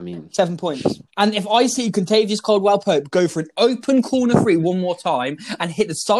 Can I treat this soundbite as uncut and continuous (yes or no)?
no